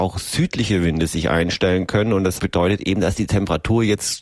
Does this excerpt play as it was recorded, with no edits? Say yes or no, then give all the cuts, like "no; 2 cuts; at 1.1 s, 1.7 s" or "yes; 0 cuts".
yes; 0 cuts